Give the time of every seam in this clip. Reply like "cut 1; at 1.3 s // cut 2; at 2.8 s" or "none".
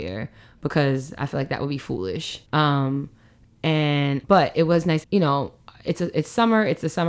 cut 1; at 2.5 s // cut 2; at 4.2 s // cut 3; at 5.0 s